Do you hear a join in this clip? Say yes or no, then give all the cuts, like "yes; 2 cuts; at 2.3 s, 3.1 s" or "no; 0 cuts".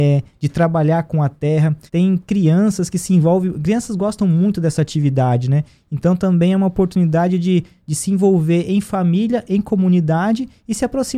yes; 1 cut; at 1.9 s